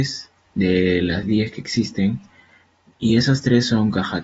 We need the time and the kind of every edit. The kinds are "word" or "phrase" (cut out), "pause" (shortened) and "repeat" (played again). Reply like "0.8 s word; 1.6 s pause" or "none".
none